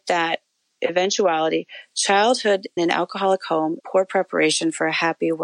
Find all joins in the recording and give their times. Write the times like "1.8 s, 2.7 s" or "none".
2.8 s, 3.8 s